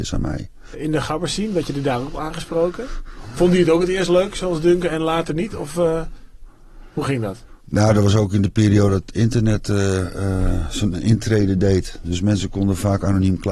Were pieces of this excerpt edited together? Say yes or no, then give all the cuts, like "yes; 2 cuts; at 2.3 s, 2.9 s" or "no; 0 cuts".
yes; 1 cut; at 7.6 s